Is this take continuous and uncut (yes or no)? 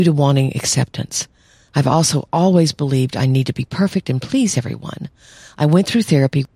yes